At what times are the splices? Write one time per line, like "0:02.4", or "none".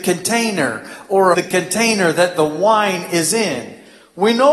0:01.3